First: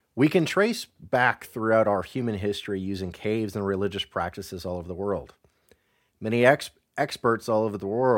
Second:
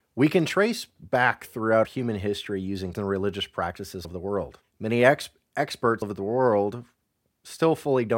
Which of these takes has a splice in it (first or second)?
second